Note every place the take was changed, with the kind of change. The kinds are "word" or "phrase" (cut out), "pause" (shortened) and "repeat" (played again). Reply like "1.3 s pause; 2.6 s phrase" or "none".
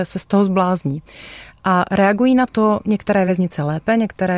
none